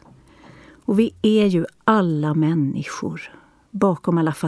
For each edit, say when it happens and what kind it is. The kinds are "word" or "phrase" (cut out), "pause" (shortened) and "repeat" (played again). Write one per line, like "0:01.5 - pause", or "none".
none